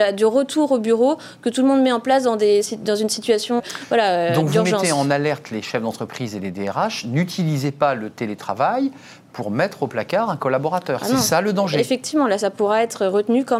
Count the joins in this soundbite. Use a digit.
1